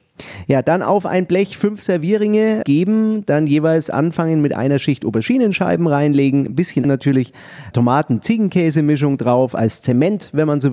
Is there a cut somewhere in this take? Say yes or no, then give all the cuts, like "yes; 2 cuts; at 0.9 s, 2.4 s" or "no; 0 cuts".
yes; 3 cuts; at 2.6 s, 6.8 s, 7.7 s